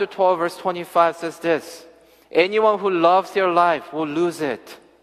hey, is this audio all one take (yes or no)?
yes